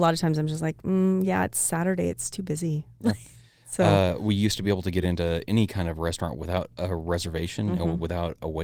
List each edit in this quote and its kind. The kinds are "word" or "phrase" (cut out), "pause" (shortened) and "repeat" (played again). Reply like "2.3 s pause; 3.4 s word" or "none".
none